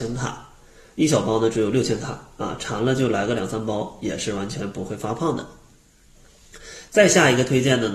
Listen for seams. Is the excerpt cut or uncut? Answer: uncut